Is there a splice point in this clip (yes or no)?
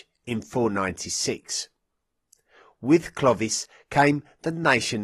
no